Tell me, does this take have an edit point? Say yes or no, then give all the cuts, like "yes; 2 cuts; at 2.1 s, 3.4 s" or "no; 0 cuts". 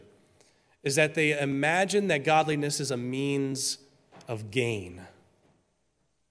no; 0 cuts